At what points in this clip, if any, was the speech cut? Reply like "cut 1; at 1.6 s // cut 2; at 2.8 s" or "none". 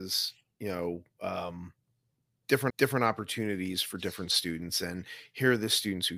cut 1; at 2.7 s